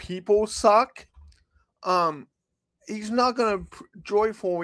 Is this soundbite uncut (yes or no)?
yes